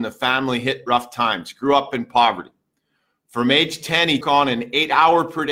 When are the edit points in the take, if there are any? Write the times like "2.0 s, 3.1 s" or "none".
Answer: 4.2 s